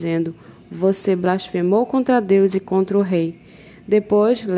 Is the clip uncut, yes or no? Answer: yes